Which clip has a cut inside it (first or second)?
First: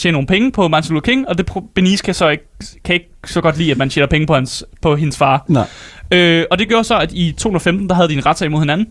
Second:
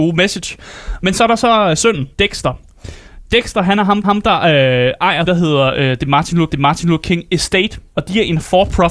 second